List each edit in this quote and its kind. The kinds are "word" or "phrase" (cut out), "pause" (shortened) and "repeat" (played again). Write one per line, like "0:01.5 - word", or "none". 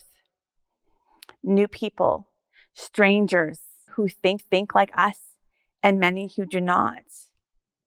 0:03.9 - word
0:04.4 - repeat